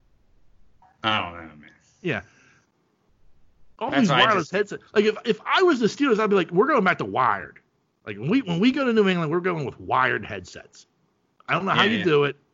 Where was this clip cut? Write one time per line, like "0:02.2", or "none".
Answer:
none